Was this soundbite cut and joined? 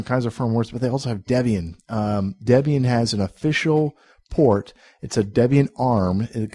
no; 0 cuts

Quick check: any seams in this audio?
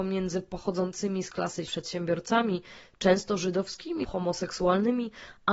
yes; 2 cuts; at 1.7 s, 4.0 s

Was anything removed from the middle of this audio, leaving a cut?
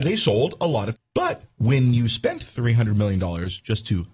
yes; 1 cut; at 0.9 s

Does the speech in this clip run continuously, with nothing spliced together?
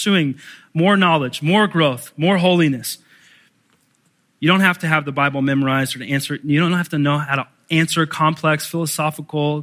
yes; 0 cuts

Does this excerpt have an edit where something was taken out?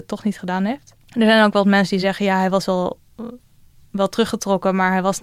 no; 0 cuts

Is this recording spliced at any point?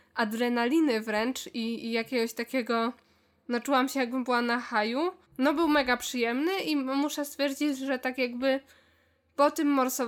yes; 1 cut; at 5.2 s

